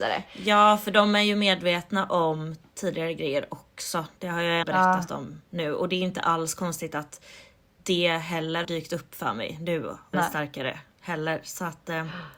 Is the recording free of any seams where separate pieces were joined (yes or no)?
no